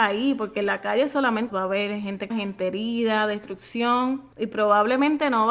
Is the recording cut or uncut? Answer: cut